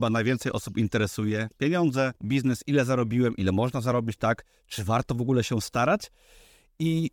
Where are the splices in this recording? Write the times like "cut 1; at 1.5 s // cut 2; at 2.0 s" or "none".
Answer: cut 1; at 2.2 s